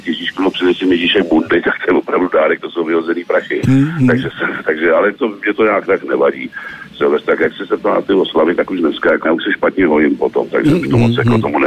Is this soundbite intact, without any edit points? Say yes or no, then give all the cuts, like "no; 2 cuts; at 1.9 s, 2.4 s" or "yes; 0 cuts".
no; 2 cuts; at 5.2 s, 9.2 s